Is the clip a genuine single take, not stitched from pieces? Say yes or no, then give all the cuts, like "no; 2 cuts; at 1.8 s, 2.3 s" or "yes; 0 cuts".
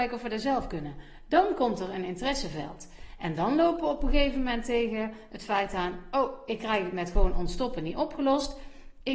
yes; 0 cuts